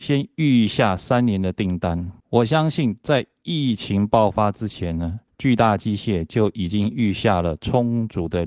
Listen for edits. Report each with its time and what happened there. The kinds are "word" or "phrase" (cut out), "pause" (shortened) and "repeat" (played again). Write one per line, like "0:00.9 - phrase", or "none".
none